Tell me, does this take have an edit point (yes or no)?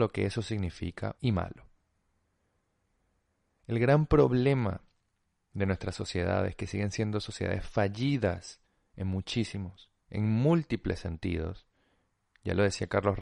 yes